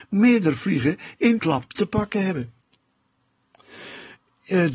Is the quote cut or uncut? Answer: cut